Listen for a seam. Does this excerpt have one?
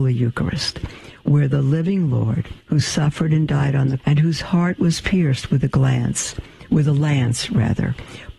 yes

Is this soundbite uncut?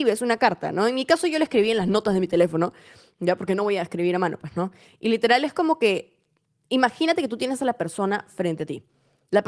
yes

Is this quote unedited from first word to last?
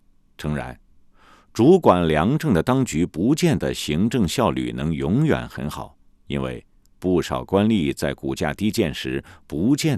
yes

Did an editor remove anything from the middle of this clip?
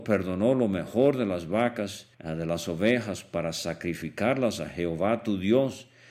yes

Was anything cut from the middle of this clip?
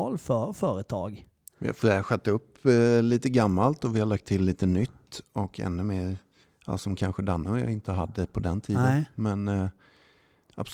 no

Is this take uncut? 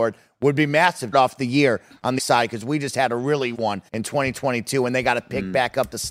no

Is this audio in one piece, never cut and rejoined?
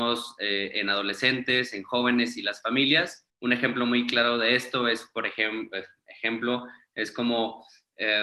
no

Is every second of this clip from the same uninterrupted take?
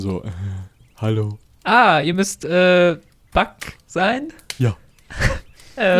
yes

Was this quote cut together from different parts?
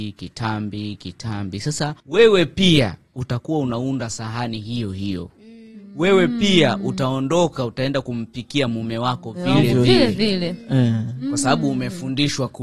yes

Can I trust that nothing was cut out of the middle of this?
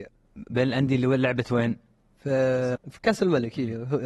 no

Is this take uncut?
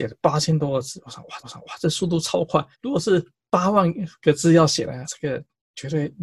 no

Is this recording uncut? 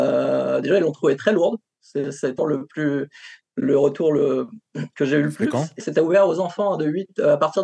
no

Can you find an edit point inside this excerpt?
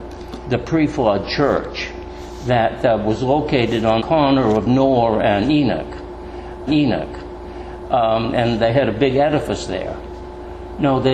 yes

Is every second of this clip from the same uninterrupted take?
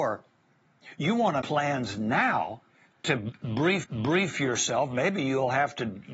no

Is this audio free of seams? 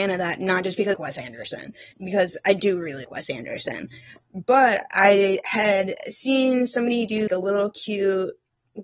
no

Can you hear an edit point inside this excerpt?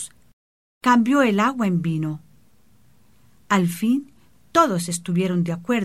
no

